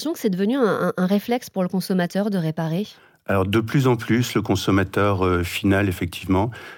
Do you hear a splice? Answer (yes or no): no